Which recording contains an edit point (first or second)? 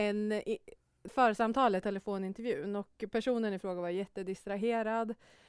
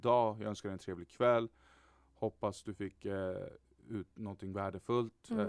first